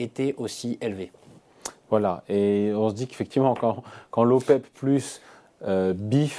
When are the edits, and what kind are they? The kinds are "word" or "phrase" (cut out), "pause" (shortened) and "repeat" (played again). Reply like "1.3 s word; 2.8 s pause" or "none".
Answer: none